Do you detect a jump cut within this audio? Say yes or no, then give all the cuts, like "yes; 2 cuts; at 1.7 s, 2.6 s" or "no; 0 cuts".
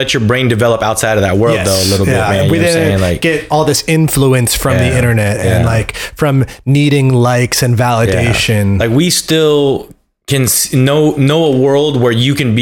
no; 0 cuts